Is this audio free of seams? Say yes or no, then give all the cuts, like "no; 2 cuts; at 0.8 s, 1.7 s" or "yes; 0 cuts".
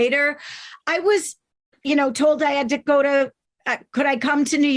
yes; 0 cuts